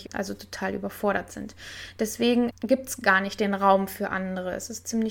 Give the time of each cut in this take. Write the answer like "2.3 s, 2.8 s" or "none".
none